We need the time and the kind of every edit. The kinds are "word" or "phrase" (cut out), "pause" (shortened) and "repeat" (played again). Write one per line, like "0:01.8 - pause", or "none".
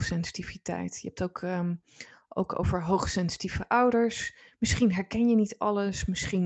none